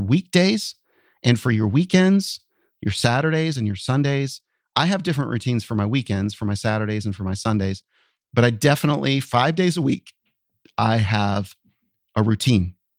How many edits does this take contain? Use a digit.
0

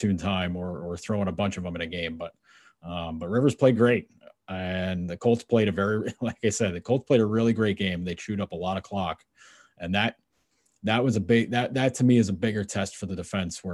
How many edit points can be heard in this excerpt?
0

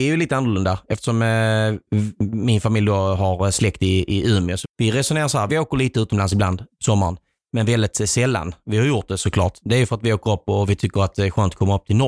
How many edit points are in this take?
2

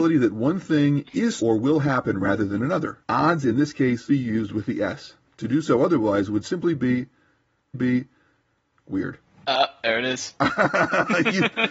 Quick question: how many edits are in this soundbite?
4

